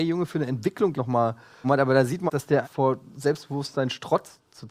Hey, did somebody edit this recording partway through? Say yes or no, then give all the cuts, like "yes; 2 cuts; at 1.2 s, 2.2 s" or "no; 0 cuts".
yes; 4 cuts; at 0.9 s, 1.6 s, 2.3 s, 2.6 s